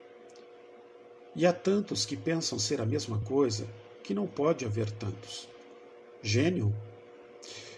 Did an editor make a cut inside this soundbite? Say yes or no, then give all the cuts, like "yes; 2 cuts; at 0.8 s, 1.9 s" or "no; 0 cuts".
no; 0 cuts